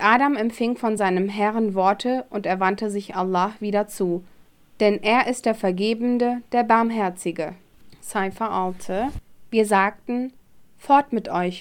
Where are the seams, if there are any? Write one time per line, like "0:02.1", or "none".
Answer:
none